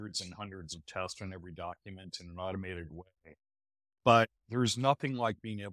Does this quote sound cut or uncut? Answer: uncut